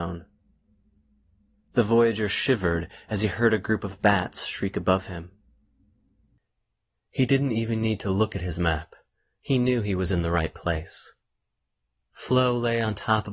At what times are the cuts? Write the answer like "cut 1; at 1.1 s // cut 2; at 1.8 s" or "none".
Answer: none